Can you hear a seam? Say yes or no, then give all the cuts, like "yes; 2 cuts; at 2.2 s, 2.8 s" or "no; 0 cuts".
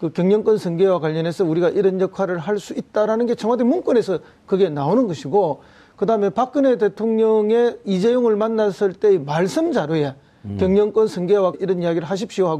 yes; 1 cut; at 11.5 s